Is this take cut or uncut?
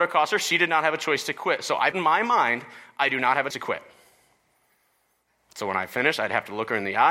cut